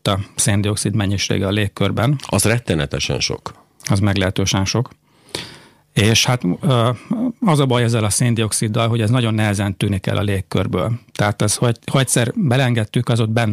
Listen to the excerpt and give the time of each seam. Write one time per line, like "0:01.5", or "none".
none